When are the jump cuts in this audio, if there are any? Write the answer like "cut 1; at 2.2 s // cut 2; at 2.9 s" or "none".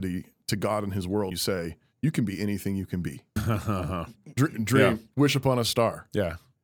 cut 1; at 1.3 s // cut 2; at 3.4 s // cut 3; at 5.1 s